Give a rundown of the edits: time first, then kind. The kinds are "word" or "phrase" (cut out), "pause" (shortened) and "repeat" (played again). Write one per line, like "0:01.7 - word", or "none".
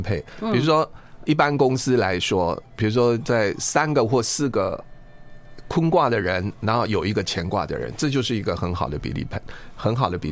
0:01.3 - word